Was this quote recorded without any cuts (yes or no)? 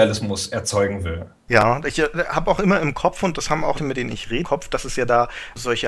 no